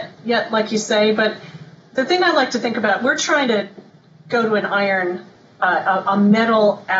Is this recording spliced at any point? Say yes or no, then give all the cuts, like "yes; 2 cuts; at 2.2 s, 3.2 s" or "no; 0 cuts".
no; 0 cuts